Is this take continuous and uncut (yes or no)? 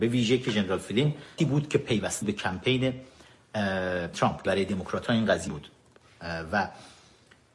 no